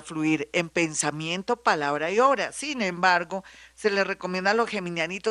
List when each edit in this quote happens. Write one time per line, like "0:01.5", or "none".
none